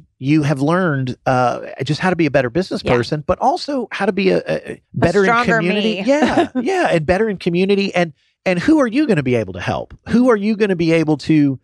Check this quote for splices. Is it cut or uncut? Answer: cut